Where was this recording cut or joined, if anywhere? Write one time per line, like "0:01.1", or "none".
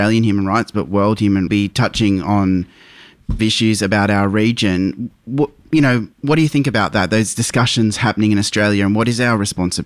0:01.5
0:03.4
0:06.1